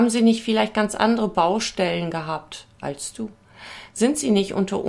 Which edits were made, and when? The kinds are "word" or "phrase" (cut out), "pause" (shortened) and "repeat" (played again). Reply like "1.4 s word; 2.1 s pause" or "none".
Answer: 2.7 s pause